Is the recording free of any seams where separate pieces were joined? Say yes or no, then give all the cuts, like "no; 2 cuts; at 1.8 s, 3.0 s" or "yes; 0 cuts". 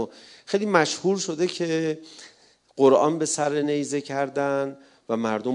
yes; 0 cuts